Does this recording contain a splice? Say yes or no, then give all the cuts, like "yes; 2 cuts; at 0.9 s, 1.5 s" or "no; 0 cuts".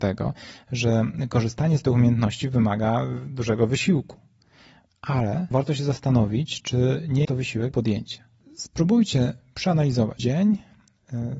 yes; 4 cuts; at 5.5 s, 7.2 s, 7.7 s, 10.2 s